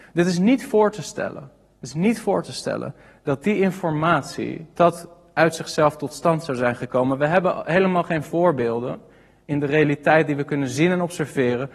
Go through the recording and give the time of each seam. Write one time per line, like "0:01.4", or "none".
0:04.7